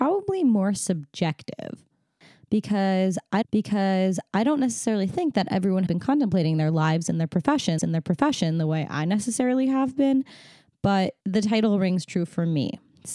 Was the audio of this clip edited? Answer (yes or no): yes